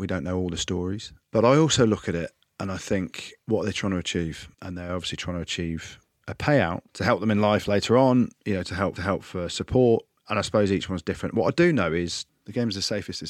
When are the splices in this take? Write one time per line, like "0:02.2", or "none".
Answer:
0:03.4
0:04.5
0:06.9
0:09.0